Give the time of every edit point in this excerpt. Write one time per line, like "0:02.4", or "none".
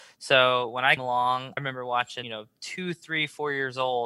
0:01.0
0:01.6
0:02.2